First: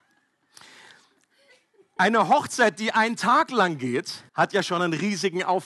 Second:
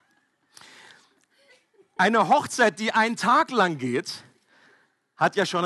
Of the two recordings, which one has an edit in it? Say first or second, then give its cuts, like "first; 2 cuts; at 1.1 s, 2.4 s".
first; 1 cut; at 4.3 s